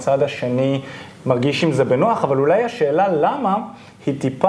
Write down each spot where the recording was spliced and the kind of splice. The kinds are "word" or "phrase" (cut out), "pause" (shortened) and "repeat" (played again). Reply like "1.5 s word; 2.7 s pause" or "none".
none